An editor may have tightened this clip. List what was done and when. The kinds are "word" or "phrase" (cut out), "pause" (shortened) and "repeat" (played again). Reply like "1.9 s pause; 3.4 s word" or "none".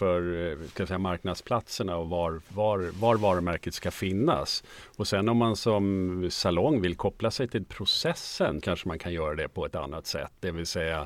7.6 s word; 8.6 s word